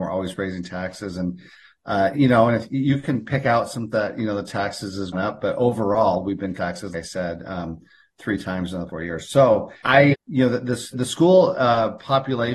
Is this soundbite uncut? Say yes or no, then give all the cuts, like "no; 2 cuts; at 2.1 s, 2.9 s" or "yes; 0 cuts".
no; 9 cuts; at 2.1 s, 3.9 s, 5.1 s, 6.6 s, 6.9 s, 8.9 s, 9.8 s, 10.1 s, 10.9 s